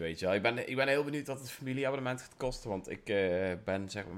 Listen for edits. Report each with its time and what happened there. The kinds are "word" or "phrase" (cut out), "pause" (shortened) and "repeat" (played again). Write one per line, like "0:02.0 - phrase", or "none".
none